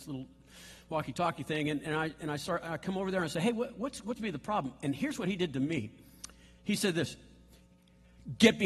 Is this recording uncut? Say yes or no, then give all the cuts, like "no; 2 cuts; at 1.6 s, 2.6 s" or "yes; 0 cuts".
no; 1 cut; at 4.2 s